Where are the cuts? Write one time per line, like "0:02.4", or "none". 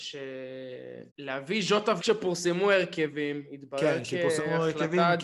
0:01.1
0:02.0